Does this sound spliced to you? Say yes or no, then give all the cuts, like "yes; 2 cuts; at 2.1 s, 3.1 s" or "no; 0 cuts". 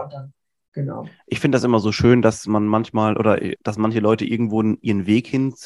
yes; 1 cut; at 3.5 s